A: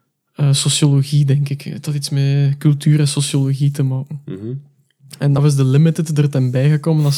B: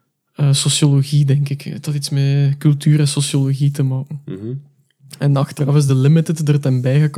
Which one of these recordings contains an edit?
A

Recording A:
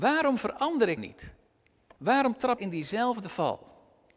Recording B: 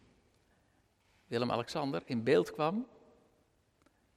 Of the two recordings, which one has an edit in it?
A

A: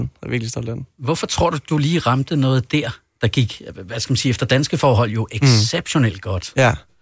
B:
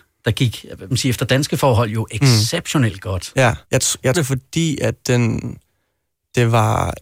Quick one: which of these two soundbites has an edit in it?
B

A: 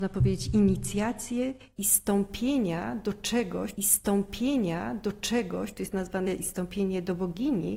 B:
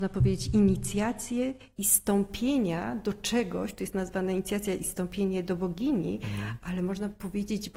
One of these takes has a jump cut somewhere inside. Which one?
A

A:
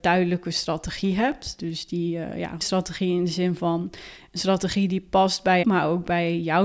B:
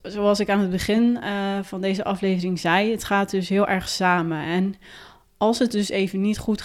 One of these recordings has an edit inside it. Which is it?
A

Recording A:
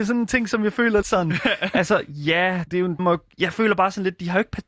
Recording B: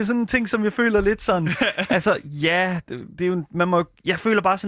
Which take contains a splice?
A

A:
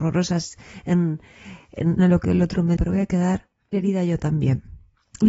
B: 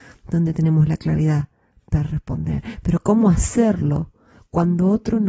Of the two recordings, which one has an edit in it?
A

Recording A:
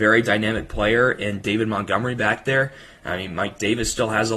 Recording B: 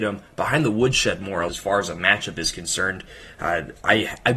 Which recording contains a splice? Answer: B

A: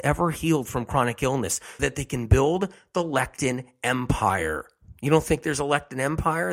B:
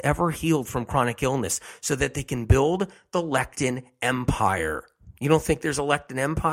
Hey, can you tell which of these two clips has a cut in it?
A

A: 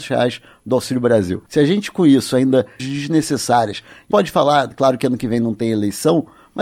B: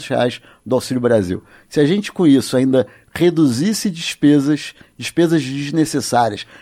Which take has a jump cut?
A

